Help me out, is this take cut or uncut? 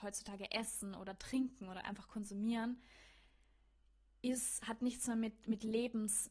uncut